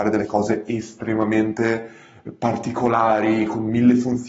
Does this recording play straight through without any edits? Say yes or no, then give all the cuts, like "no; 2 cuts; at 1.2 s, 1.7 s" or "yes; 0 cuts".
yes; 0 cuts